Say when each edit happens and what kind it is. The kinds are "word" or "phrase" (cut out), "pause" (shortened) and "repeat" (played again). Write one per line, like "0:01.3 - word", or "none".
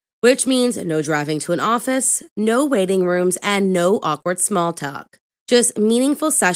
none